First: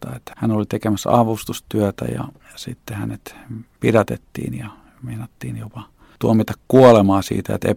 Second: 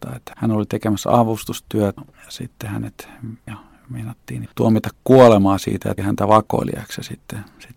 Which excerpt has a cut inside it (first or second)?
second